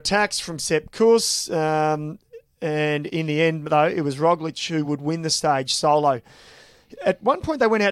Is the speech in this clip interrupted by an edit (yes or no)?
no